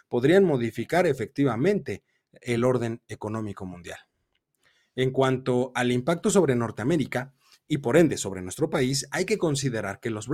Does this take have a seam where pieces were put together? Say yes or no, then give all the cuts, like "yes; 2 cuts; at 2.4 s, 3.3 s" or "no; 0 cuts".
no; 0 cuts